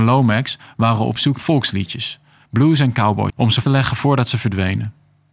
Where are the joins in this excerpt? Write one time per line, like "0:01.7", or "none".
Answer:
0:01.4
0:03.3
0:03.6